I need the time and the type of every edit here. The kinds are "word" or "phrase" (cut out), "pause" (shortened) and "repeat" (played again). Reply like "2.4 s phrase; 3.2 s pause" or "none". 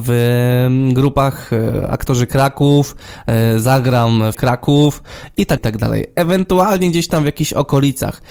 4.3 s word; 5.6 s word